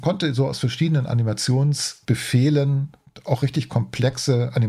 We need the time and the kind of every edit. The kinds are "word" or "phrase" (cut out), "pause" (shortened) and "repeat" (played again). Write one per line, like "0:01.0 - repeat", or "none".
none